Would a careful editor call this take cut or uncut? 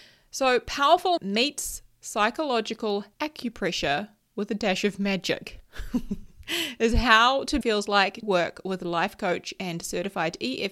cut